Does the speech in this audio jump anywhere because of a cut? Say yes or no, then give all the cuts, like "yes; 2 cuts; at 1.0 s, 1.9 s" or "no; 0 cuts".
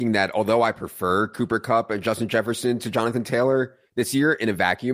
no; 0 cuts